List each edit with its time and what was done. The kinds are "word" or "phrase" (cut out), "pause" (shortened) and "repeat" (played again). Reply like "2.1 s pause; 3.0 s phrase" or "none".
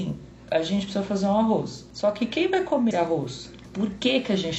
2.9 s word